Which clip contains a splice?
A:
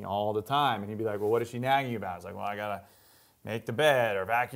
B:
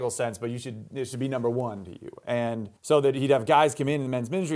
B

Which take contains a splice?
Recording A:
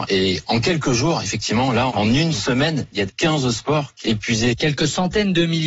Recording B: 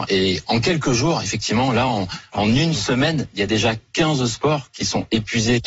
A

